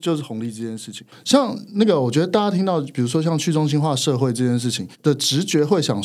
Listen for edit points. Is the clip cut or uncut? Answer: cut